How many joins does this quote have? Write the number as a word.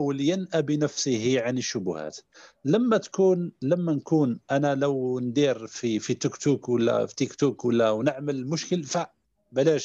zero